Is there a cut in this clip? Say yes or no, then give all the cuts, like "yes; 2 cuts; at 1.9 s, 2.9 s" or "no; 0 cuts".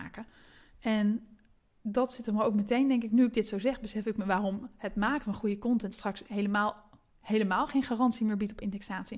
no; 0 cuts